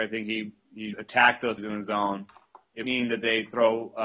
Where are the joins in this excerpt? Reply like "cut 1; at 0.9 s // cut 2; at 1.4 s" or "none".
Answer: cut 1; at 0.9 s // cut 2; at 1.6 s // cut 3; at 2.8 s